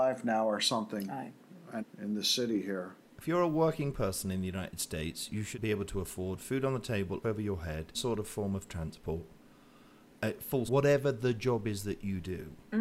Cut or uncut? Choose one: cut